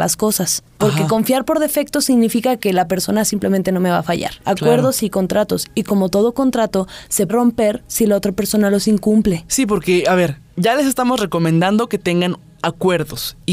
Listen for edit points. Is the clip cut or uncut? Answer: cut